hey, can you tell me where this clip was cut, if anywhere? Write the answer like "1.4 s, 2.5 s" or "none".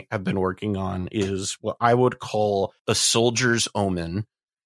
2.8 s